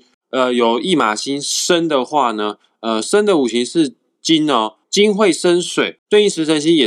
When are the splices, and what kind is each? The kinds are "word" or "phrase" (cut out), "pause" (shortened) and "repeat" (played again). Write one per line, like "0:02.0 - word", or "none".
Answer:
0:04.8 - pause